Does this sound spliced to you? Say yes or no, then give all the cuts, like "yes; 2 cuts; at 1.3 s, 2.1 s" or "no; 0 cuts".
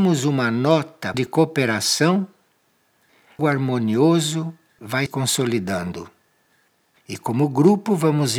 yes; 3 cuts; at 1.1 s, 3.4 s, 5.1 s